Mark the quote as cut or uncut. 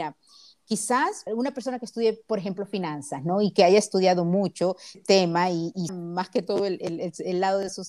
cut